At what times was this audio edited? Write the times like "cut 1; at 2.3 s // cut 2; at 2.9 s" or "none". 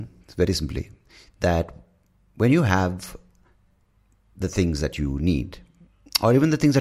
none

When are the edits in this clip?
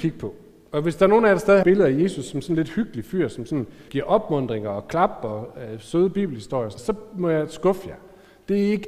cut 1; at 1.6 s // cut 2; at 3.9 s // cut 3; at 6.8 s

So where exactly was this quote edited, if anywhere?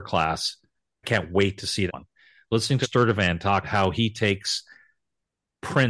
cut 1; at 1.0 s // cut 2; at 1.9 s // cut 3; at 2.8 s // cut 4; at 3.6 s

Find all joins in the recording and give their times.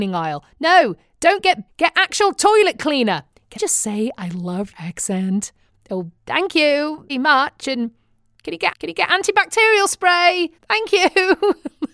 cut 1; at 1.7 s // cut 2; at 3.6 s // cut 3; at 4.7 s // cut 4; at 6.2 s // cut 5; at 7.1 s // cut 6; at 8.7 s // cut 7; at 10.6 s

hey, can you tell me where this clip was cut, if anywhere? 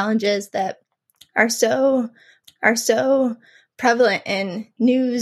cut 1; at 2.4 s

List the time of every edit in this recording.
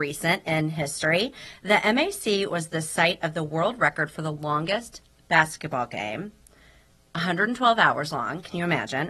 none

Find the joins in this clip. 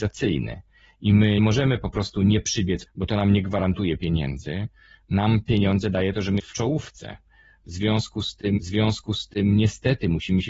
cut 1; at 1.4 s // cut 2; at 2.9 s // cut 3; at 6.4 s // cut 4; at 8.6 s

